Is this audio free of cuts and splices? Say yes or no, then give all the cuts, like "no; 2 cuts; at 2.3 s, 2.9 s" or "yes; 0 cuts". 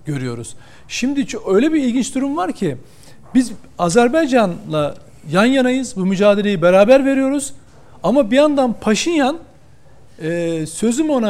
yes; 0 cuts